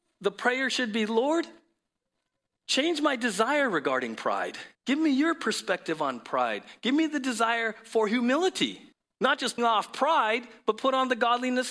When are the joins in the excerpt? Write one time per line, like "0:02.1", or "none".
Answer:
0:04.7
0:08.9
0:09.6